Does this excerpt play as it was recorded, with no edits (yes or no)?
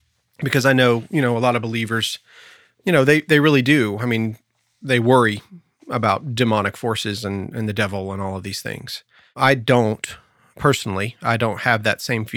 yes